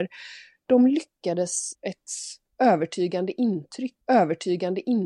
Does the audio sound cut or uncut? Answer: cut